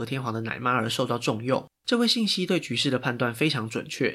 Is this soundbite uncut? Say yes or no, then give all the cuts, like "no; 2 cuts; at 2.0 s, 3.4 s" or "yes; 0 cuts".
no; 1 cut; at 1.7 s